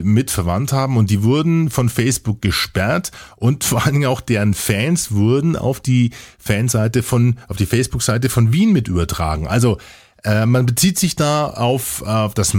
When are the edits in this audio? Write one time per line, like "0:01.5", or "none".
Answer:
none